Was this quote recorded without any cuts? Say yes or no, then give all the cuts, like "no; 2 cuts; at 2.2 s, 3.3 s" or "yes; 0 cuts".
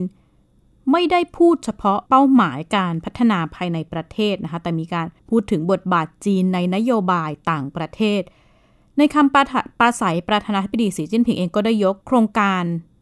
no; 3 cuts; at 2.1 s, 5.2 s, 12.0 s